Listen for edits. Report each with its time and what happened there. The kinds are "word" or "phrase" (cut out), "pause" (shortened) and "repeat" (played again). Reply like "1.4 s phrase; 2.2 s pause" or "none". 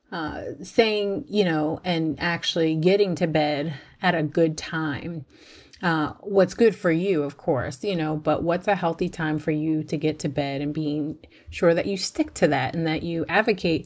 none